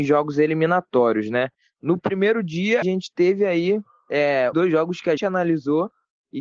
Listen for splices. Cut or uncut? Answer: cut